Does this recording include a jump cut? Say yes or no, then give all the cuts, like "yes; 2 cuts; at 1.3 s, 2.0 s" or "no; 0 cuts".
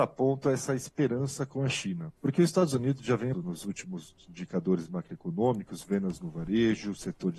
yes; 2 cuts; at 2.2 s, 3.3 s